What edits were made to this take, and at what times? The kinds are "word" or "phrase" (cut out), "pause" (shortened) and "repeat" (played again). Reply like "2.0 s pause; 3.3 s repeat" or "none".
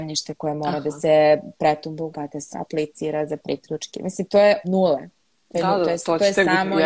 2.1 s word; 2.5 s word; 4.6 s word